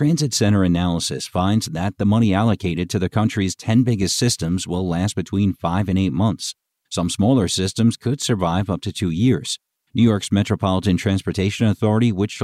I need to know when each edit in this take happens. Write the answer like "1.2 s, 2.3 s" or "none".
none

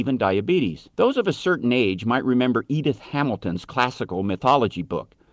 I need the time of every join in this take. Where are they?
0.9 s

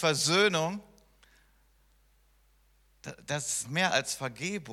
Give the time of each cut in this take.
3.6 s

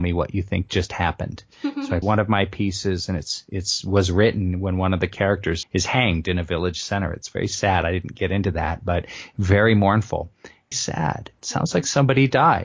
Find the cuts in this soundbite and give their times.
2.0 s, 5.6 s, 10.7 s

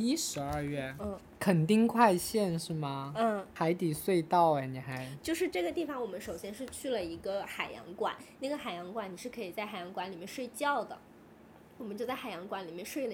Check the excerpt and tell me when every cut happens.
none

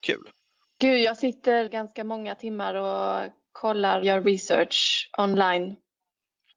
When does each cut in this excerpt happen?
1.7 s, 4.0 s

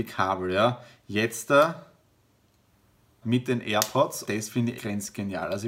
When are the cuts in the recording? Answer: 3.2 s, 4.2 s, 4.8 s

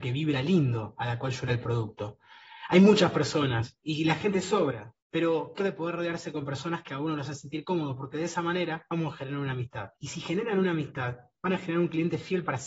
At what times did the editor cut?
1.5 s, 5.0 s, 5.6 s, 9.9 s

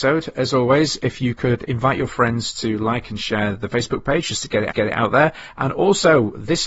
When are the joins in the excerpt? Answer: 4.7 s

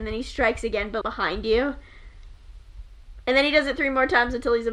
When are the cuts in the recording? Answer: 1.0 s

